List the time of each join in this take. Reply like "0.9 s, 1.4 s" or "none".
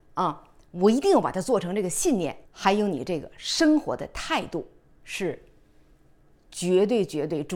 2.5 s, 4.9 s